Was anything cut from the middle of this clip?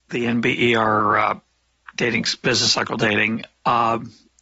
no; 0 cuts

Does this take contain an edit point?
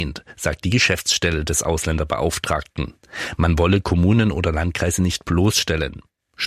no; 0 cuts

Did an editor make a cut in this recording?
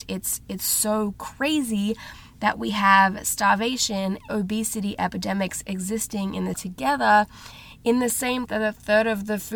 yes; 3 cuts; at 4.3 s, 6.5 s, 8.5 s

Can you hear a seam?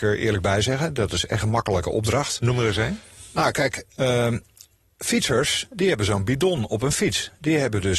yes; 1 cut; at 1.4 s

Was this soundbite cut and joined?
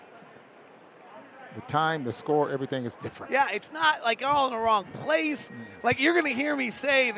no; 0 cuts

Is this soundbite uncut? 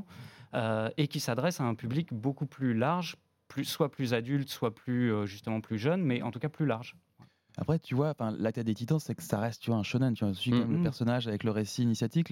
yes; 0 cuts

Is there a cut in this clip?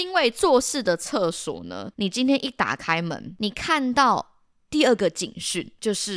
yes; 2 cuts; at 1.9 s, 4.5 s

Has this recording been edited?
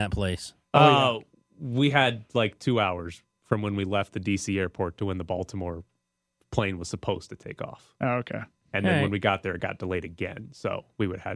no; 0 cuts

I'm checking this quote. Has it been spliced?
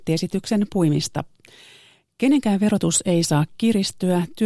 no; 0 cuts

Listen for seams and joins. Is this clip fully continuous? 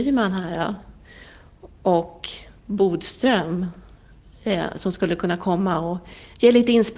yes; 0 cuts

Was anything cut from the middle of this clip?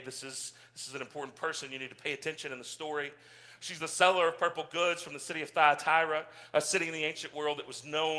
no; 0 cuts

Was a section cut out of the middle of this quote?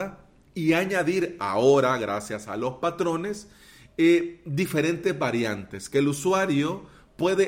no; 0 cuts

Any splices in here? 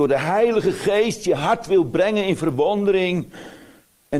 no; 0 cuts

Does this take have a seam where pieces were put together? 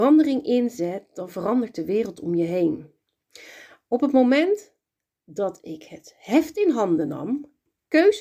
no; 0 cuts

